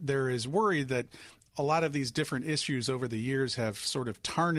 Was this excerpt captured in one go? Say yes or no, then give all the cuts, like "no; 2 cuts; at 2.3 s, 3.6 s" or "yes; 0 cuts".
yes; 0 cuts